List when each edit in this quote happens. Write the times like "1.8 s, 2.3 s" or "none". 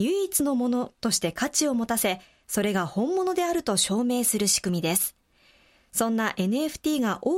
none